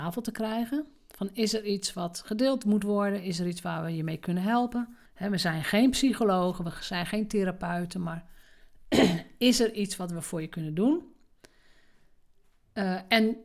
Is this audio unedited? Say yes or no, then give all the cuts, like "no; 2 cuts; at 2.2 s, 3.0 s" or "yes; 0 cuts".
no; 1 cut; at 5.1 s